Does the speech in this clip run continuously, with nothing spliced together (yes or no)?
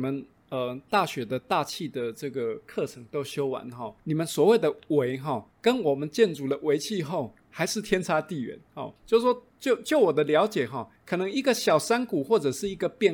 no